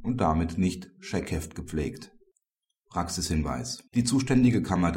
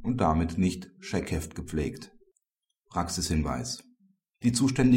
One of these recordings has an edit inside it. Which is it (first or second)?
first